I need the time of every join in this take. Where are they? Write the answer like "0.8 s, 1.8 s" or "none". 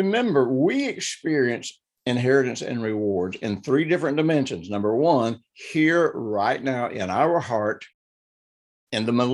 none